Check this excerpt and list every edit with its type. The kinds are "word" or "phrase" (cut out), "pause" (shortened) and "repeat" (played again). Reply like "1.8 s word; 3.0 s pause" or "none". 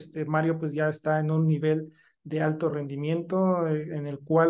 none